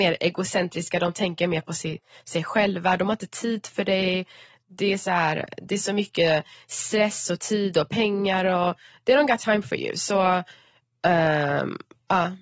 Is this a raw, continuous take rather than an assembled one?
yes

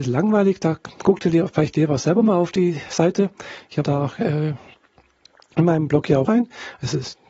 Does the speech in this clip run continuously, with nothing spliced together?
no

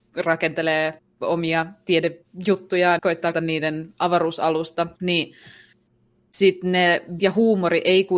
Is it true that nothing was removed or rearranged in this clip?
no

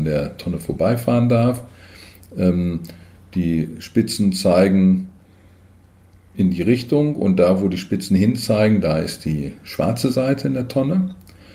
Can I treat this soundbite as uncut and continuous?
yes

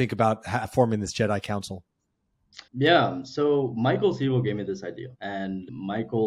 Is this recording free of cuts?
no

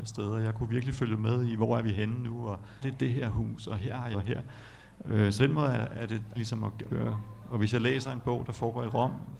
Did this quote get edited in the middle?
yes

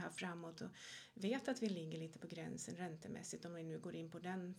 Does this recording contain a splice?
no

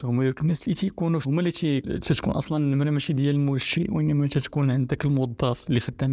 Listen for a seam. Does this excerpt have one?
yes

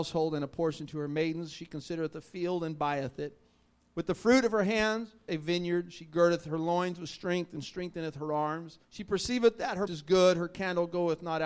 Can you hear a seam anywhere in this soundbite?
yes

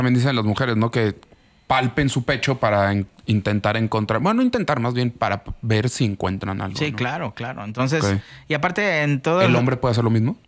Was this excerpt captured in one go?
yes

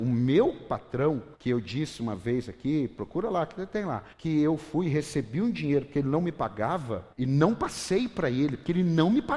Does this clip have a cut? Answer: yes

